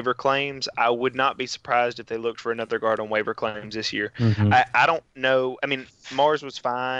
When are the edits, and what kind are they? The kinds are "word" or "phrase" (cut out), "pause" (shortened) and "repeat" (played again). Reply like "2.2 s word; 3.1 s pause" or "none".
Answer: none